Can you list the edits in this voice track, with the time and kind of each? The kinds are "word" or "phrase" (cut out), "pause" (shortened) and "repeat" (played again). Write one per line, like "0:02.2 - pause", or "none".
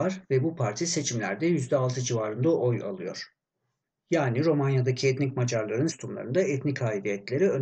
0:05.9 - word